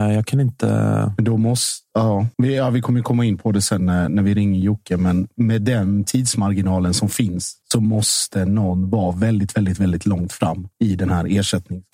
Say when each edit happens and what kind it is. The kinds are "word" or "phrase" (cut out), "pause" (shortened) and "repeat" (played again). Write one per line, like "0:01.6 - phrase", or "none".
0:02.3 - pause
0:07.6 - pause
0:10.7 - pause